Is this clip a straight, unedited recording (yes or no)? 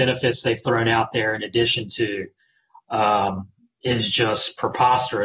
yes